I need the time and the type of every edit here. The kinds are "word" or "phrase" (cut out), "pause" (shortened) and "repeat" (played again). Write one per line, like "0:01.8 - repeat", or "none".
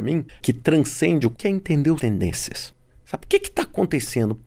0:01.3 - word
0:02.0 - phrase

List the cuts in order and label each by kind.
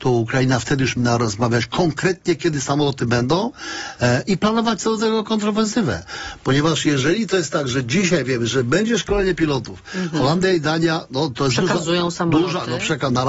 0:01.0 - word

